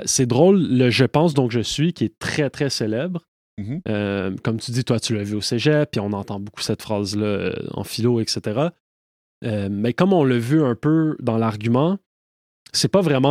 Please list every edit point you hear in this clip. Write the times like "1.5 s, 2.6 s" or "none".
none